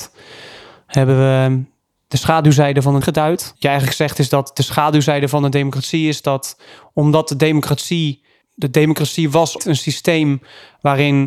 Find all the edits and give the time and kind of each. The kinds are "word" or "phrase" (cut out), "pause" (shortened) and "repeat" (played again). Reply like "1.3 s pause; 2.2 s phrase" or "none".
3.0 s word; 3.6 s word; 9.6 s word